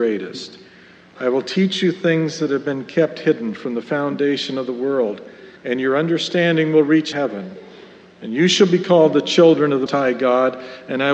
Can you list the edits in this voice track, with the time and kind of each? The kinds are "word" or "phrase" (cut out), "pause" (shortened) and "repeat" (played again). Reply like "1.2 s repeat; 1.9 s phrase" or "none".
5.6 s pause; 7.1 s word; 9.9 s word